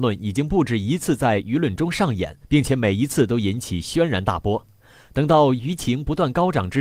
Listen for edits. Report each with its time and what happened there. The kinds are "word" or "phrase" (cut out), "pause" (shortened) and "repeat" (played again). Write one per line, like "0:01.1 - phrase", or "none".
0:02.4 - pause